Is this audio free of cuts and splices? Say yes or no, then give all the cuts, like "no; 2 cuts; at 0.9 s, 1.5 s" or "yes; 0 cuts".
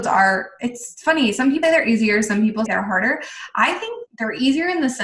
no; 3 cuts; at 1.6 s, 2.7 s, 4.1 s